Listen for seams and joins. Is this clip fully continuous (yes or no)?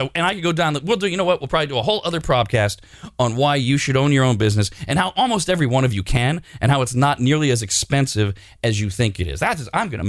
yes